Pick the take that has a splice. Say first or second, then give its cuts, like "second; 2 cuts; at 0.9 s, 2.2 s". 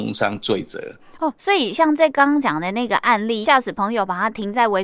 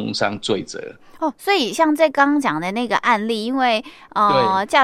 first; 1 cut; at 3.4 s